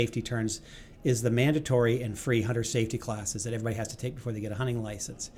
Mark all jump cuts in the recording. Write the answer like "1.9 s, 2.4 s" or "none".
none